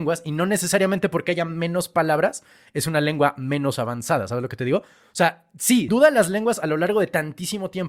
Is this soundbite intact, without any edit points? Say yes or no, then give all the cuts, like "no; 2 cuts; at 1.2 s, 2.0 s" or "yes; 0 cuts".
no; 1 cut; at 5.9 s